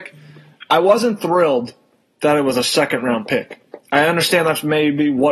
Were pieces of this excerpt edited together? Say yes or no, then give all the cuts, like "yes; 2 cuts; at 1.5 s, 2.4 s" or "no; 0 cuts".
no; 0 cuts